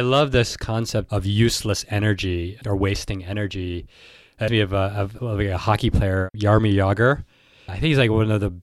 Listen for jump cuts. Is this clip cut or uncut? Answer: cut